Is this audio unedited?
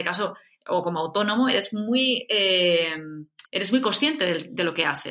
no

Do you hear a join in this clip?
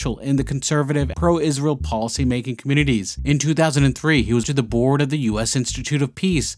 yes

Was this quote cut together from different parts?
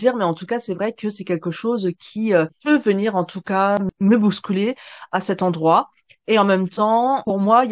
no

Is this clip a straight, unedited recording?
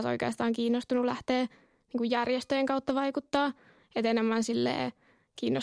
yes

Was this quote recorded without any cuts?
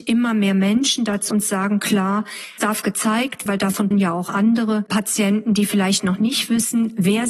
no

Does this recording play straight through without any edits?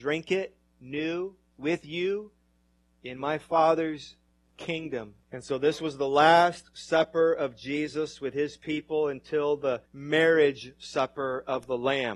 no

